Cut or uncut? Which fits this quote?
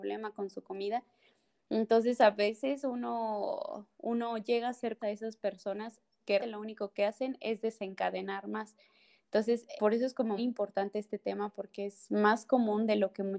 cut